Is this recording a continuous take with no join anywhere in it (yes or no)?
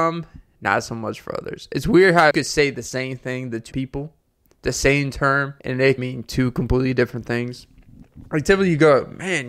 no